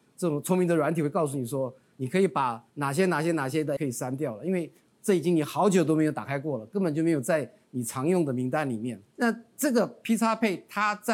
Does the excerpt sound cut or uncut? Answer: cut